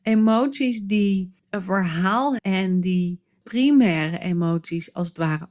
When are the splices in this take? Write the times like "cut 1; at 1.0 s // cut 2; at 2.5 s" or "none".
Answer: cut 1; at 1.4 s // cut 2; at 2.4 s // cut 3; at 3.4 s